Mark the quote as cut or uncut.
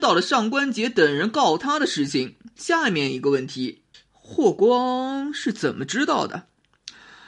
cut